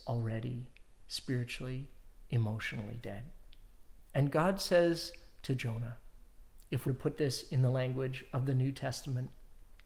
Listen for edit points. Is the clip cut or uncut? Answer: cut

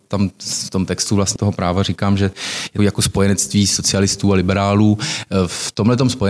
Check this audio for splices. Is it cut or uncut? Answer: cut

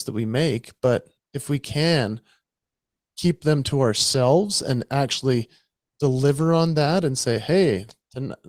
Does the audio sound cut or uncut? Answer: uncut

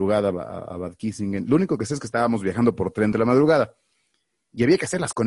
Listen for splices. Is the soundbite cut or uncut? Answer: cut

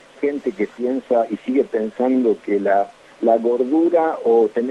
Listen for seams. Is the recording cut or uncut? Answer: uncut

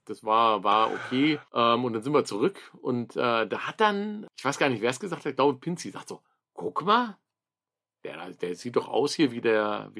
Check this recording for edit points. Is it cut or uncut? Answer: uncut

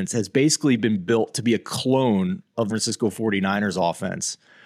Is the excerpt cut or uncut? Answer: cut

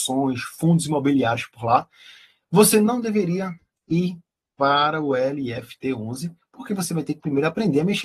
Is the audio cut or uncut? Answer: uncut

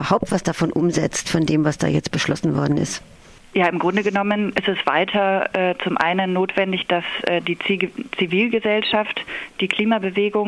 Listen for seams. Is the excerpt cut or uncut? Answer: uncut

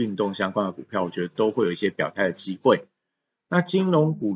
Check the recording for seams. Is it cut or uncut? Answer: uncut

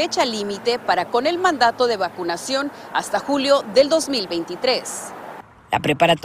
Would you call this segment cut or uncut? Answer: cut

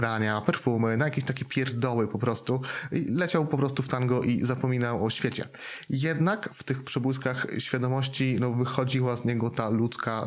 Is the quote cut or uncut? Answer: uncut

